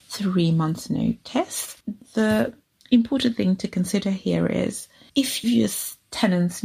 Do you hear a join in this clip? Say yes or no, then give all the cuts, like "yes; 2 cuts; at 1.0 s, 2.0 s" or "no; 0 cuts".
yes; 1 cut; at 5.4 s